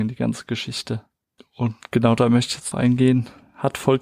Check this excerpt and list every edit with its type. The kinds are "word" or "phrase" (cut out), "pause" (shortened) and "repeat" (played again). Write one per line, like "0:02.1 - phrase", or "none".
0:01.4 - pause
0:02.7 - word